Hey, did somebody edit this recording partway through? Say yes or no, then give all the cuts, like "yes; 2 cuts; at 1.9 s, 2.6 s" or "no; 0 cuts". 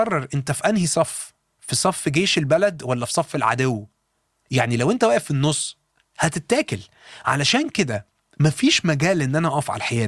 no; 0 cuts